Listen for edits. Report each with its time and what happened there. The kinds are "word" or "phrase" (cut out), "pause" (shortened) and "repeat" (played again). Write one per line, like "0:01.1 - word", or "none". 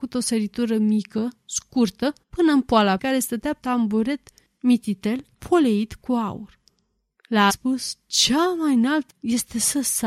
0:02.2 - pause
0:03.0 - word
0:03.6 - word
0:05.3 - pause
0:07.5 - phrase
0:09.1 - word